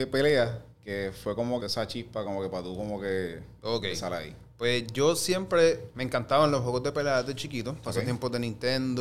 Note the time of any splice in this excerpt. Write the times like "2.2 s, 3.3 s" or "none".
1.6 s, 5.9 s

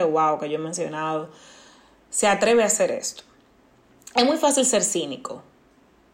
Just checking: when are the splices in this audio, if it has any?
none

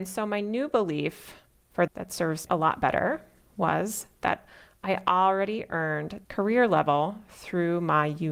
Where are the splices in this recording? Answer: 1.9 s, 2.5 s, 6.3 s

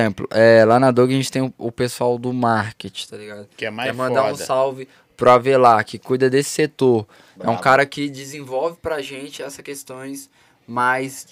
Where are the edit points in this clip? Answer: none

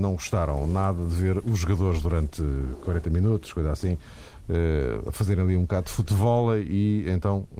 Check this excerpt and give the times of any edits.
none

